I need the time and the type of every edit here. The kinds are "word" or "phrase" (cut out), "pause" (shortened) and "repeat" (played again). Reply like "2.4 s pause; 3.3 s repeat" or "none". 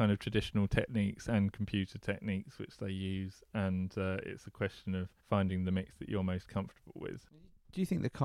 5.2 s pause